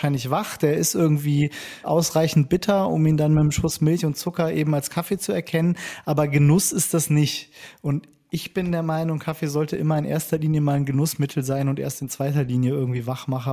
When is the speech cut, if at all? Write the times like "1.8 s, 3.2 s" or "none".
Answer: 1.8 s